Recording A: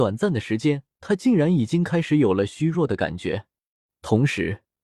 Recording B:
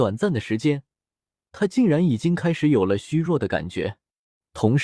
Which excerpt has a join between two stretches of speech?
A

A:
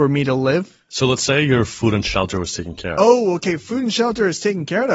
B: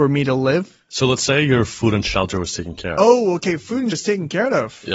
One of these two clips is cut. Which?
B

